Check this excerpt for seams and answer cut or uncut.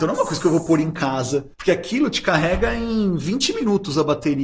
cut